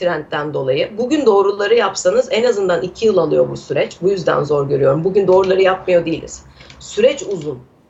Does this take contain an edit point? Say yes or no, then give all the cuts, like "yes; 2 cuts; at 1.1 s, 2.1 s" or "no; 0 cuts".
no; 0 cuts